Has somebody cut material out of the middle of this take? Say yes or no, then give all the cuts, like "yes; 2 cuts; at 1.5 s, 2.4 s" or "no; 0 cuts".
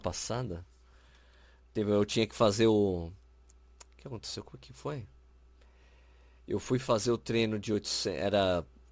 no; 0 cuts